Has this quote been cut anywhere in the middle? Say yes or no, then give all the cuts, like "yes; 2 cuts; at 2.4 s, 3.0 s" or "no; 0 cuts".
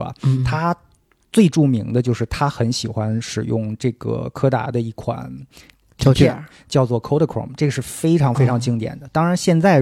no; 0 cuts